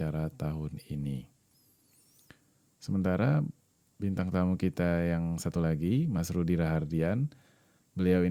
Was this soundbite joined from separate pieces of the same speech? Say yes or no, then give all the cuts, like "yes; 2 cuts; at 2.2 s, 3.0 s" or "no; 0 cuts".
no; 0 cuts